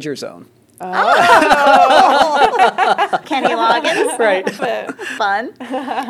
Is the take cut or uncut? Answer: cut